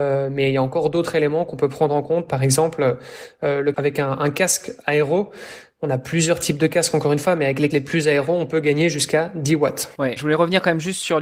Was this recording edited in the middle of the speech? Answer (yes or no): yes